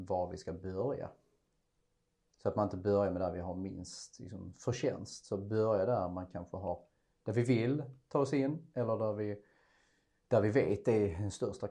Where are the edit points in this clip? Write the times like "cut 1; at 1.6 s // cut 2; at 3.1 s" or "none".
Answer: none